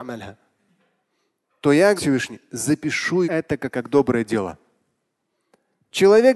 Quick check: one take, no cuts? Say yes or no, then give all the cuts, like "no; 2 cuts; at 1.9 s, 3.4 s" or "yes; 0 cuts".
no; 3 cuts; at 2.0 s, 3.2 s, 3.7 s